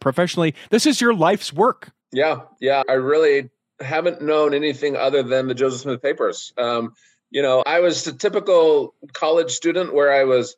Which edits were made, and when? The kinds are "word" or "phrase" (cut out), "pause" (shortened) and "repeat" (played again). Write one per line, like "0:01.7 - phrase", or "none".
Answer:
0:02.0 - pause
0:02.8 - word
0:07.6 - word